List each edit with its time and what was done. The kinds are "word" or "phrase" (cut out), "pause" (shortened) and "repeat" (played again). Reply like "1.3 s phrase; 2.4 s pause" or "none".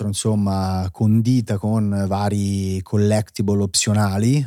none

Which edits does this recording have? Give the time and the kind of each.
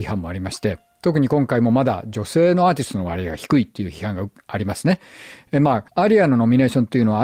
5.9 s pause

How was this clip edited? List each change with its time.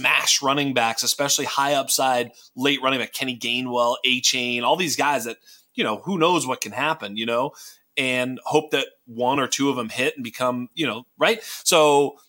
none

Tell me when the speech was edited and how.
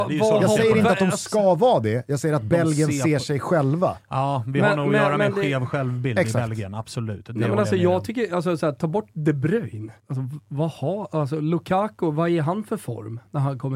10.0 s pause

